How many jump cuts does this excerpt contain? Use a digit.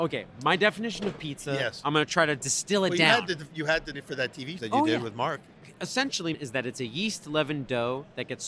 3